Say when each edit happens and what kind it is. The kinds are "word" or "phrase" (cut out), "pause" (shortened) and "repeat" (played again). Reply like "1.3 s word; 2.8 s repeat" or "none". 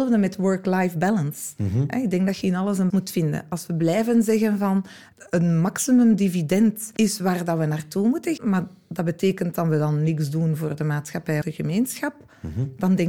2.9 s word; 8.4 s word; 11.4 s phrase